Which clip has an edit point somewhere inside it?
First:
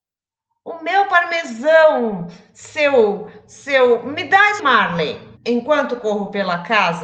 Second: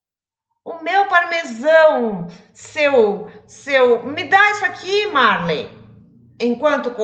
first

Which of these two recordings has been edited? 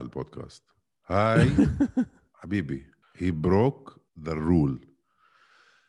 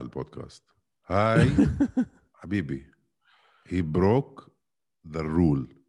first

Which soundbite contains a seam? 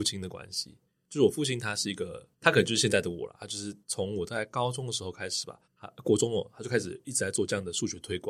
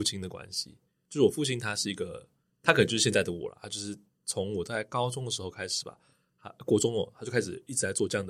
first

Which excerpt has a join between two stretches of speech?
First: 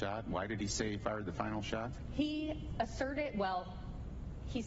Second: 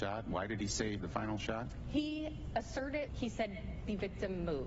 second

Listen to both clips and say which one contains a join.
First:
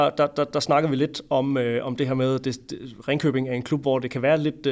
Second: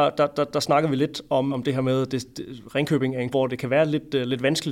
second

